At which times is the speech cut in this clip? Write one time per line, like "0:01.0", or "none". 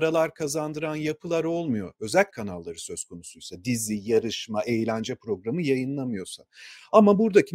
0:02.3